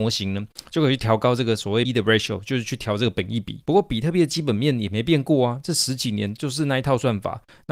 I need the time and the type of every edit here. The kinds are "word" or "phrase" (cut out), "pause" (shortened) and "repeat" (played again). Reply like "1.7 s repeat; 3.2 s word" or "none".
1.8 s word; 3.6 s pause